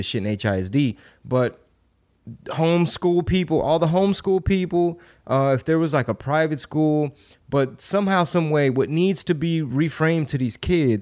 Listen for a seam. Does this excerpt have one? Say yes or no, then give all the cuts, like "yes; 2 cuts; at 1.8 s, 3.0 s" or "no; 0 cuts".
no; 0 cuts